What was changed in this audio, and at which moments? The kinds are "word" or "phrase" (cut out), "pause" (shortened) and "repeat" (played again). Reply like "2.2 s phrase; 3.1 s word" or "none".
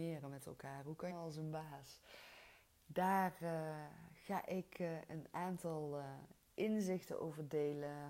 1.1 s phrase